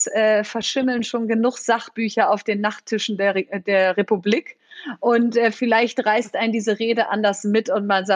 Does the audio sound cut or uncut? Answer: uncut